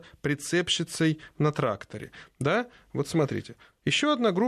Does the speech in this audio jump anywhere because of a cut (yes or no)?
no